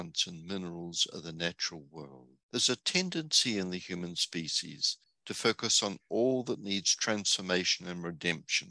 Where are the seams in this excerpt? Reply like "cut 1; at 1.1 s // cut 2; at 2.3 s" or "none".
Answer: cut 1; at 2.4 s // cut 2; at 5.0 s